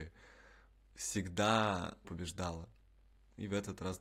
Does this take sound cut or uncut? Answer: cut